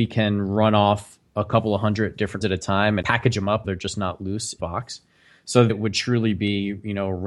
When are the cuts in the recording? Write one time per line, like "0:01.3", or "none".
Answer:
0:02.4
0:03.0
0:03.6
0:04.6
0:05.7